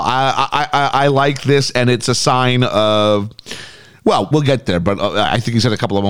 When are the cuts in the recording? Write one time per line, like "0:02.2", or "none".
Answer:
0:04.3